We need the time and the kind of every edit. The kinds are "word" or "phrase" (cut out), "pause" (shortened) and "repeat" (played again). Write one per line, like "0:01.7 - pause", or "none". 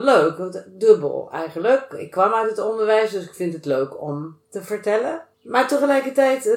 0:05.3 - pause

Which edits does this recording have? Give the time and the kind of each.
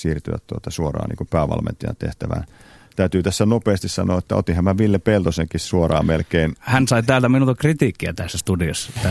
none

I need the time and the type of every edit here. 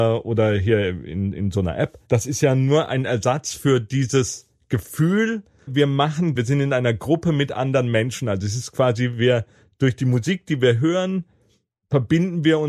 0:05.7 - word
0:06.4 - word

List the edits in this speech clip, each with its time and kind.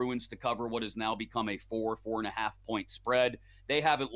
none

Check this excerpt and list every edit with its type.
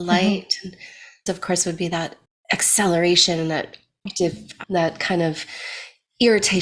0:01.3 - word
0:02.3 - pause

